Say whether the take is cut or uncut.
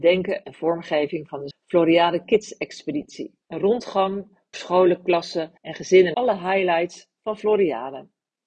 cut